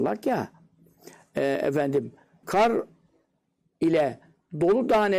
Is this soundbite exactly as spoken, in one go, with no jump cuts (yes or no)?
no